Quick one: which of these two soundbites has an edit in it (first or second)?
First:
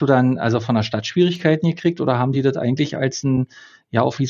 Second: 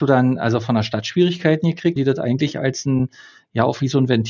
second